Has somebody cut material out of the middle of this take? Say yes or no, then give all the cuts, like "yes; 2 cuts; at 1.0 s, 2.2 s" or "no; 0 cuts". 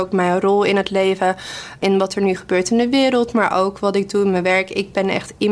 no; 0 cuts